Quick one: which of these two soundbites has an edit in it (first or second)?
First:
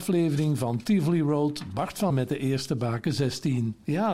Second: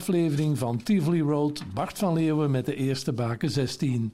first